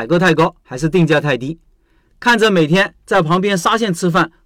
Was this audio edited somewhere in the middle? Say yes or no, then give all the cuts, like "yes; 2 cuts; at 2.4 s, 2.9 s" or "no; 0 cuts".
no; 0 cuts